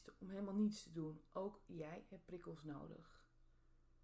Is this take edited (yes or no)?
no